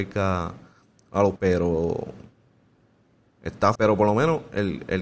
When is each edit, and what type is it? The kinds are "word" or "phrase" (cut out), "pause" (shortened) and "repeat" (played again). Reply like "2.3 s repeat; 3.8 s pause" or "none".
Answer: 1.4 s word; 3.8 s word